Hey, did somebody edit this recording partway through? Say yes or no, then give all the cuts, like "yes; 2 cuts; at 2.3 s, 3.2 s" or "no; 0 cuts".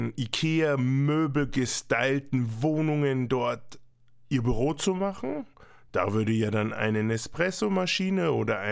no; 0 cuts